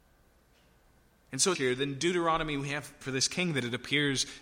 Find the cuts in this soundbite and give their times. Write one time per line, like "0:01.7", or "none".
0:01.6
0:03.0

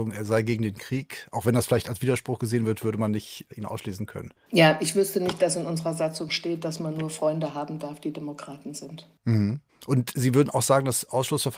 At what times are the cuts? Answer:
none

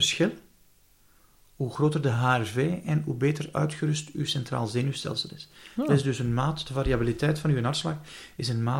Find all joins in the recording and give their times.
none

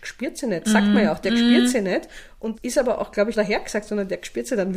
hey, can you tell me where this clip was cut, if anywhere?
0:02.5
0:03.3

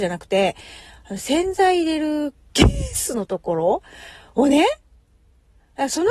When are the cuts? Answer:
none

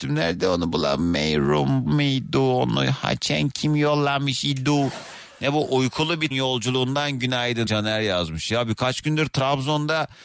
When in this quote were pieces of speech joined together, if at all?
0:01.9
0:06.3
0:07.7

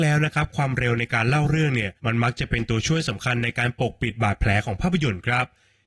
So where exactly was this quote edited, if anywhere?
0:02.0

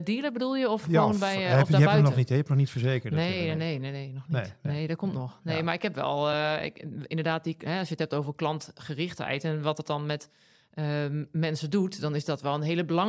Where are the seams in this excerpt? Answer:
none

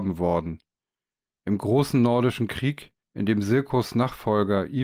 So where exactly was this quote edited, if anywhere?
0:03.0

